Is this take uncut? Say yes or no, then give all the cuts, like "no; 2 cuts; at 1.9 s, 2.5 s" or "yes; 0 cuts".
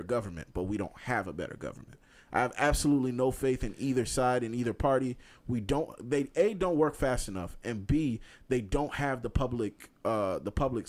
yes; 0 cuts